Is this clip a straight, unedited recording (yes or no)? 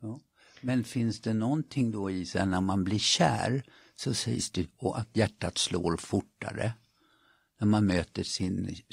yes